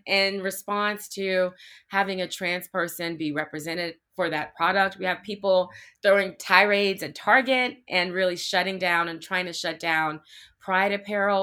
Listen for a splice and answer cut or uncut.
uncut